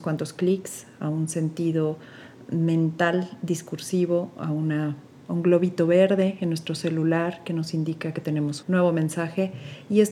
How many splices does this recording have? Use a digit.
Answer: 1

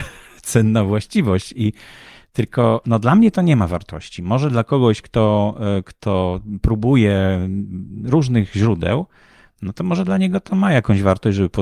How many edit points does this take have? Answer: 0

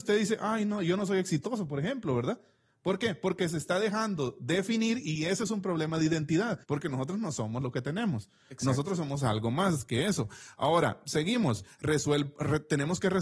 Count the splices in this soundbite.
1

